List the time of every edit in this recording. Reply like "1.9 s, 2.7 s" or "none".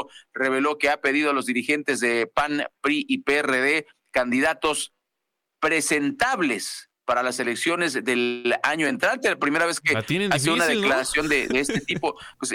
none

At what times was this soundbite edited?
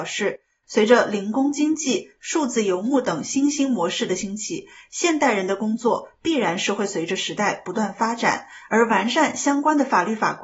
none

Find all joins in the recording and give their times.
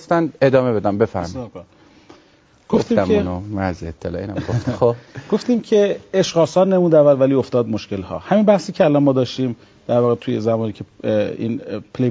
none

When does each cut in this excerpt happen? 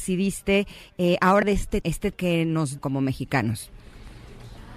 1.4 s, 1.8 s, 2.1 s, 2.8 s

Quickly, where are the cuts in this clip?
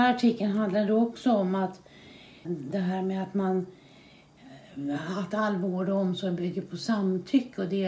2.4 s

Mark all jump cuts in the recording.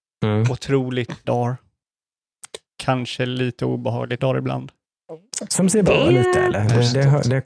1.2 s, 4.2 s

